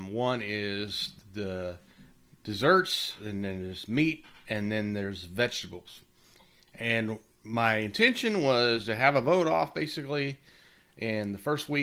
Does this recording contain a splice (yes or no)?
no